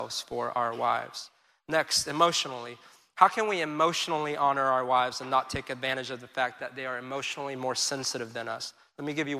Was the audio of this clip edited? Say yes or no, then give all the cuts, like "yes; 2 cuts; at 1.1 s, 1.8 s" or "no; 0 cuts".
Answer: no; 0 cuts